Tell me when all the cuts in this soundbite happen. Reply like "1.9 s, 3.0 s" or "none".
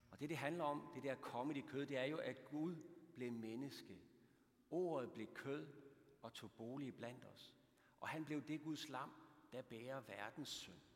none